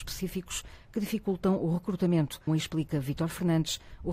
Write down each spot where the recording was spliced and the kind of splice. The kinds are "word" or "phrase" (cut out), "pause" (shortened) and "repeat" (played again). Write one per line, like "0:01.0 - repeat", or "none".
0:02.5 - word